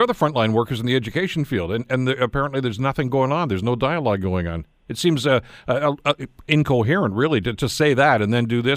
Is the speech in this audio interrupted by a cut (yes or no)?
no